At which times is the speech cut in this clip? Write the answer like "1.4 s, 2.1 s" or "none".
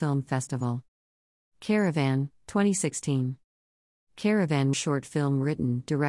4.7 s